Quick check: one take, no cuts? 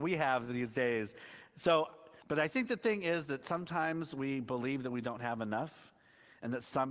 no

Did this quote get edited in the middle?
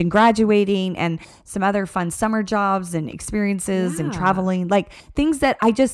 no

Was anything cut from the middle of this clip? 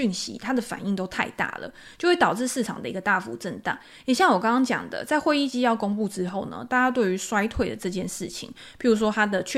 no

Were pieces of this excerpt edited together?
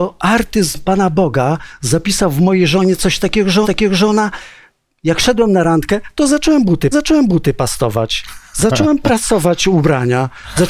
yes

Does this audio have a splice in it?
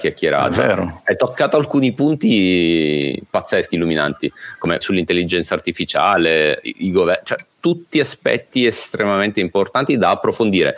yes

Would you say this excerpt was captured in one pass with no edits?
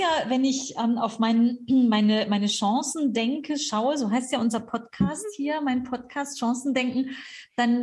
yes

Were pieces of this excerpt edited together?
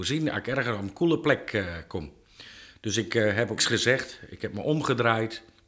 yes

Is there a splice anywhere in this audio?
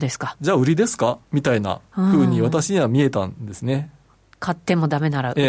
yes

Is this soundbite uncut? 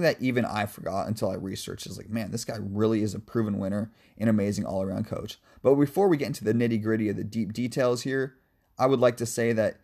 yes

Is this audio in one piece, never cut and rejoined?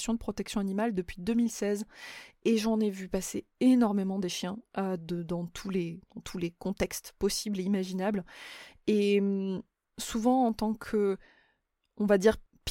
yes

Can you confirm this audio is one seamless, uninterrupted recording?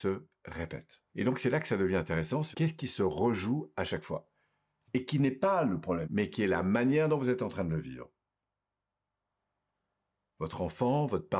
no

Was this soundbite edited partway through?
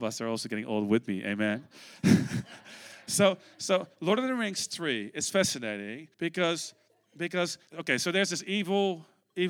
yes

